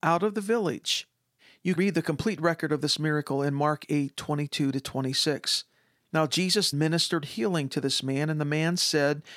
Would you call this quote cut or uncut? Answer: cut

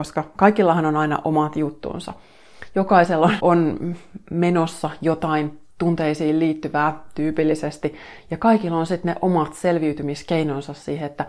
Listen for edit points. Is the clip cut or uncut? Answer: cut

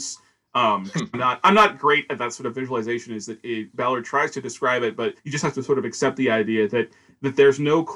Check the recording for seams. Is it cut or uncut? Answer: cut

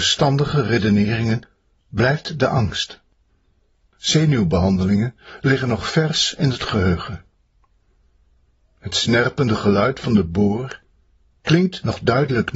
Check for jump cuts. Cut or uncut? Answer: uncut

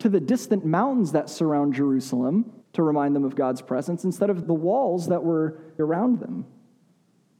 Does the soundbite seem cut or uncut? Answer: cut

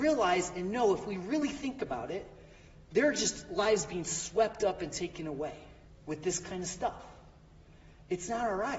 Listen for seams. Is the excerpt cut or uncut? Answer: cut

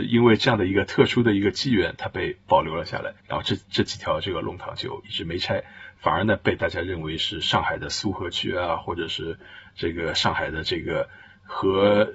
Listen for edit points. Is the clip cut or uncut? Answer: cut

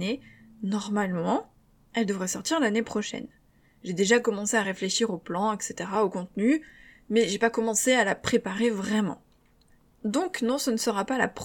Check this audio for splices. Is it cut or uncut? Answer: uncut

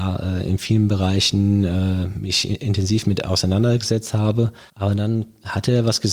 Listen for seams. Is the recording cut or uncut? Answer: cut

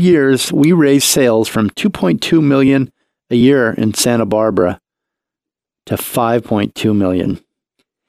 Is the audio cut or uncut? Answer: uncut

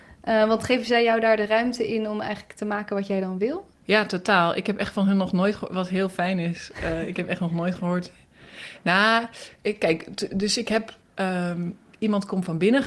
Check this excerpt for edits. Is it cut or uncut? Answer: cut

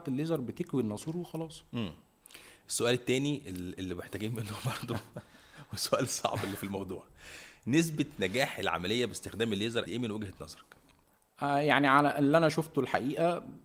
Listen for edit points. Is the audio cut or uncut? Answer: cut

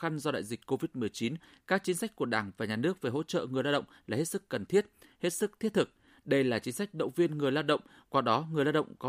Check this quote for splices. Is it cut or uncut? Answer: uncut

